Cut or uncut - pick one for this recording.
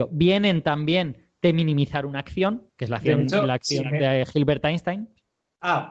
cut